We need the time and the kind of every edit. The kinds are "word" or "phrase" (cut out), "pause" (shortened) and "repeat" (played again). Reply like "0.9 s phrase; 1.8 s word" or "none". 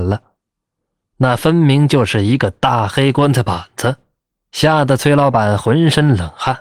4.2 s pause